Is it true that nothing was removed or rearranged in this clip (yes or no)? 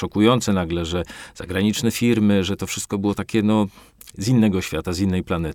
yes